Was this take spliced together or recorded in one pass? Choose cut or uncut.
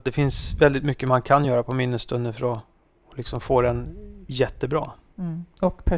uncut